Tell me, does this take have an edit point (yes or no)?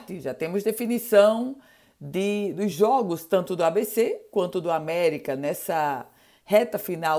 no